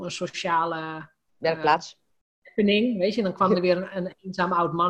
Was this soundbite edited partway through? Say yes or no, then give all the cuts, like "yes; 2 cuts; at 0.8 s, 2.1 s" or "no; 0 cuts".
no; 0 cuts